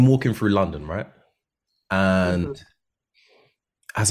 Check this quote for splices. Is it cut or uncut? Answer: uncut